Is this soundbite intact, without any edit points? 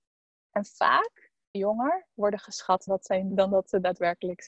no; 3 cuts; at 1.5 s, 2.9 s, 3.3 s

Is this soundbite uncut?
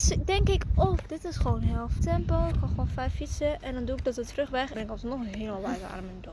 no; 2 cuts; at 2.0 s, 4.7 s

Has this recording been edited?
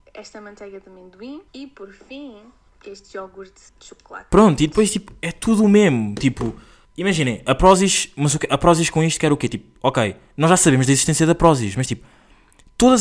yes; 4 cuts; at 1.5 s, 2.7 s, 3.7 s, 6.8 s

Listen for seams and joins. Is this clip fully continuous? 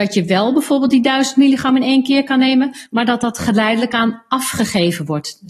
yes; 0 cuts

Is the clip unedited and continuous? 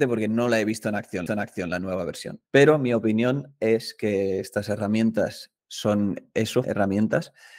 no; 4 cuts; at 1.3 s, 2.5 s, 5.6 s, 6.6 s

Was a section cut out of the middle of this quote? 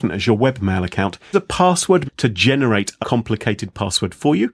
yes; 3 cuts; at 1.3 s, 2.0 s, 3.0 s

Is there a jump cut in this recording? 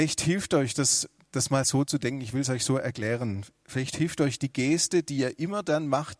no; 0 cuts

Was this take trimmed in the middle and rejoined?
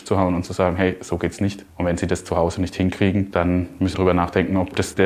yes; 1 cut; at 3.9 s

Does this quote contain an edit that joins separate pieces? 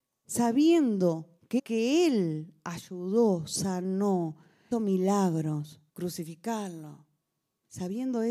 yes; 3 cuts; at 1.6 s, 4.7 s, 5.9 s

